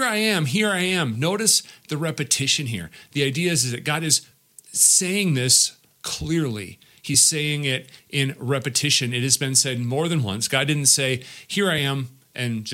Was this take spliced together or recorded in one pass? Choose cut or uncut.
uncut